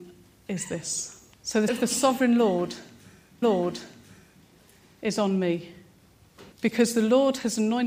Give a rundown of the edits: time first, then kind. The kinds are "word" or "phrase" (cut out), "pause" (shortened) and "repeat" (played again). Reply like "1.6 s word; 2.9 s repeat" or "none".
1.3 s pause; 1.7 s word; 3.4 s repeat; 6.5 s pause